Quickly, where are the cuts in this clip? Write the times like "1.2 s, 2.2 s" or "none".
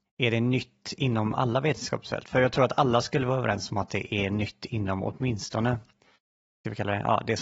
none